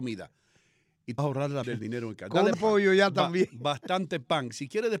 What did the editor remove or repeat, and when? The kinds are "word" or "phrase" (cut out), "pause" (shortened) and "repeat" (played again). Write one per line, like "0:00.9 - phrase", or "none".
0:01.2 - word
0:01.6 - word
0:02.5 - phrase